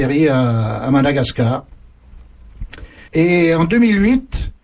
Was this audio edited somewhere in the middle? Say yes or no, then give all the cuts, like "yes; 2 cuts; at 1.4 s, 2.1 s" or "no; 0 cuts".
yes; 1 cut; at 3.1 s